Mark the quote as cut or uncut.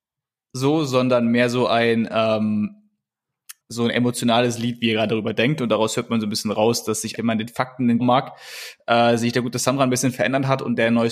cut